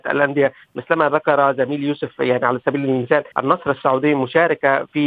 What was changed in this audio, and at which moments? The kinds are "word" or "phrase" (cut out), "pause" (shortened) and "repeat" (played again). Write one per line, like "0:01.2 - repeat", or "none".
0:03.3 - pause